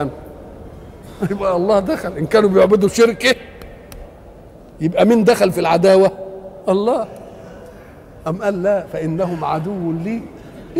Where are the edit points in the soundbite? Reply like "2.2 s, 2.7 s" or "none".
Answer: none